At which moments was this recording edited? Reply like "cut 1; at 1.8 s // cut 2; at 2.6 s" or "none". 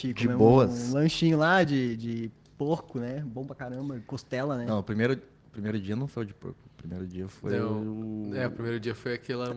none